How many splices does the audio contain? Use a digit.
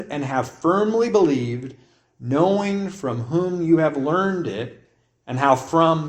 0